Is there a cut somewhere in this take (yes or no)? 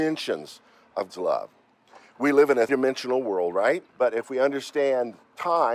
yes